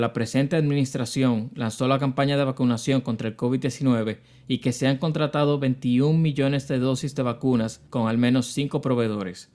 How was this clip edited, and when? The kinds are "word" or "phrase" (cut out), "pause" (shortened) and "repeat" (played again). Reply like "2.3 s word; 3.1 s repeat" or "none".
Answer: 7.9 s pause

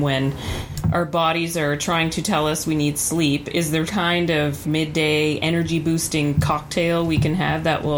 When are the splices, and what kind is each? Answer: 3.9 s word; 4.6 s word

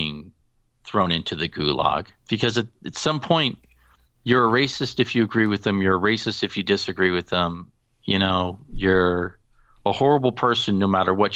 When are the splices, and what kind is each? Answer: none

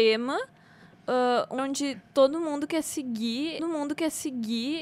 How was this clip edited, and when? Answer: 1.6 s word; 3.6 s repeat

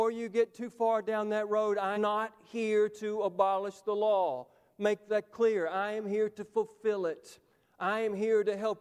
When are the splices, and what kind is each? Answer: 2.0 s word

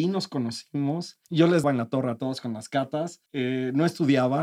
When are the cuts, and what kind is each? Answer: 1.2 s pause; 1.6 s word; 3.3 s pause

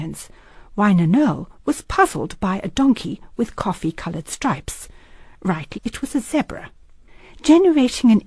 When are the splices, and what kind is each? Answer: 5.7 s word

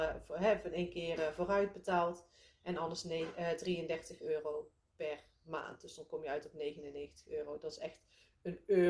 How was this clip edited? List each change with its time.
none

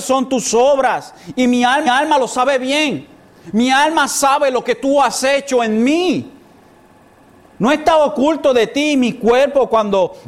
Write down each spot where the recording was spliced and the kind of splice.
1.9 s repeat

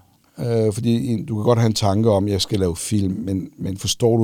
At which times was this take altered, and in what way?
none

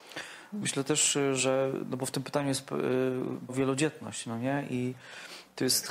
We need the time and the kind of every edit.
3.5 s word

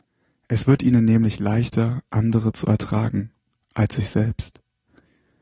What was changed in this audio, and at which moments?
none

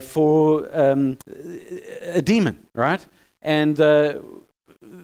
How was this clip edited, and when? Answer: 1.2 s pause; 2.7 s pause

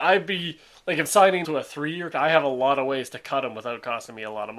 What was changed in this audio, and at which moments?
1.1 s word; 1.4 s phrase; 2.1 s word

